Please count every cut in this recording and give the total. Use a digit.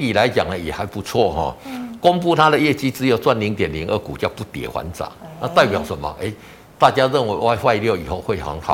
0